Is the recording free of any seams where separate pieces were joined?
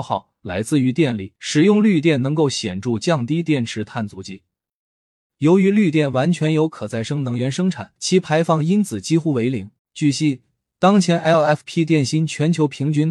no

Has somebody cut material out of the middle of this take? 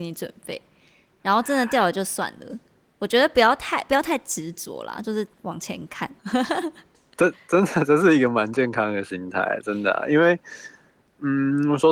yes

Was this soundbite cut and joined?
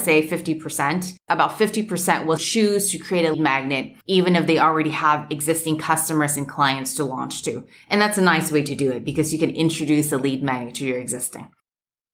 yes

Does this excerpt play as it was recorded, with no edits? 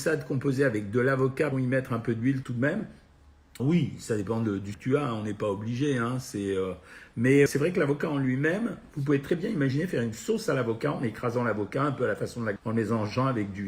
no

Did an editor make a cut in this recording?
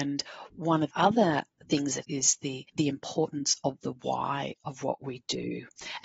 yes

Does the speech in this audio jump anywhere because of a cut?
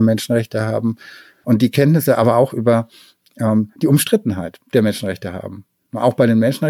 yes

